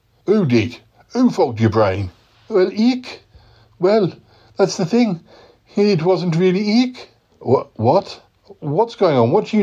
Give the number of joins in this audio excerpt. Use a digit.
0